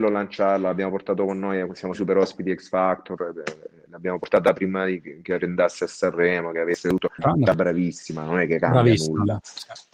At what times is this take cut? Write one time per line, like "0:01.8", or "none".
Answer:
0:01.9
0:07.2